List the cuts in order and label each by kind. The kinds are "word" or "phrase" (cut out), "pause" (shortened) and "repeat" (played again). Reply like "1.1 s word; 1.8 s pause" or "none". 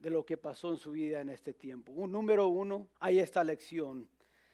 2.9 s pause